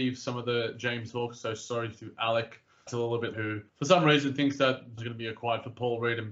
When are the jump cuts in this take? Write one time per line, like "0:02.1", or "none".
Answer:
0:01.1
0:02.9
0:03.3
0:03.7
0:05.0